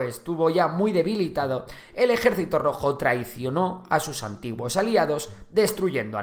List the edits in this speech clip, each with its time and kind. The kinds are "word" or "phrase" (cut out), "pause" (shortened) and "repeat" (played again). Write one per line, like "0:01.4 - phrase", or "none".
none